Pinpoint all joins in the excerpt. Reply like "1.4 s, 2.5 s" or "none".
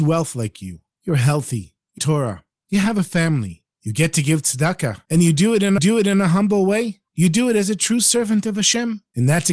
2.0 s, 5.8 s